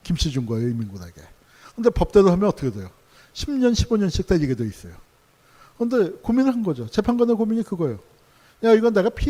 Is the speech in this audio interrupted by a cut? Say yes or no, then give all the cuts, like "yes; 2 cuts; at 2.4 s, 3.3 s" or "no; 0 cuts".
no; 0 cuts